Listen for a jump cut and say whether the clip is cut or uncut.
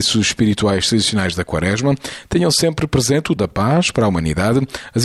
cut